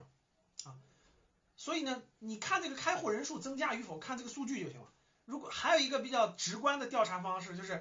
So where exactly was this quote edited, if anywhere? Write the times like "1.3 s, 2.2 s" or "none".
none